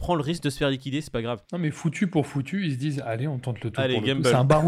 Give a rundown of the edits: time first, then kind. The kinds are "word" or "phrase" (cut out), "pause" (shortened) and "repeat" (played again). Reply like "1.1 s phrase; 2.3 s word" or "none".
none